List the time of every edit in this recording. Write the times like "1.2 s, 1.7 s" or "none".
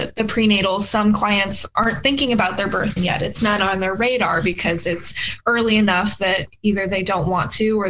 3.0 s, 3.6 s